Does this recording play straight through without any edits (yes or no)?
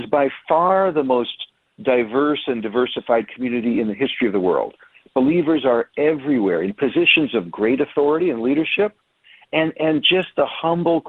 yes